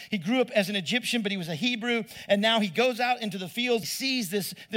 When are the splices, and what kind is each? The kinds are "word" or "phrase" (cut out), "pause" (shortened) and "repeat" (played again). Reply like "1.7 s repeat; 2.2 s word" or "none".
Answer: 3.8 s phrase